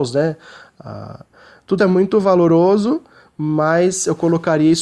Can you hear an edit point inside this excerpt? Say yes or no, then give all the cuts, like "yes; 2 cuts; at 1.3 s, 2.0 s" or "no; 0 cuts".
yes; 1 cut; at 1.8 s